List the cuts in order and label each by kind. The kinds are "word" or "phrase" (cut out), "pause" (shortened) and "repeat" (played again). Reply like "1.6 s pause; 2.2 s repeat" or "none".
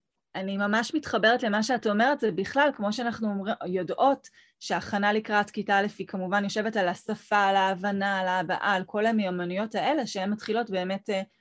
none